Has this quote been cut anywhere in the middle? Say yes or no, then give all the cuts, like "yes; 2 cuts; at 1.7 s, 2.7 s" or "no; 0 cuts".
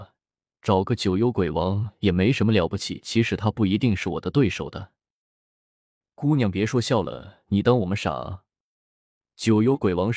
no; 0 cuts